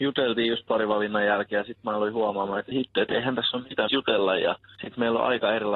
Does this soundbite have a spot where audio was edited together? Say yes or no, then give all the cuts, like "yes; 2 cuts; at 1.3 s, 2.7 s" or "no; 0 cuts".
yes; 2 cuts; at 2.7 s, 3.9 s